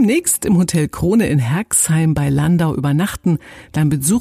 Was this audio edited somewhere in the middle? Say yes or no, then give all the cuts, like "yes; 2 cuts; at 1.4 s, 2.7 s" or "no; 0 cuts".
no; 0 cuts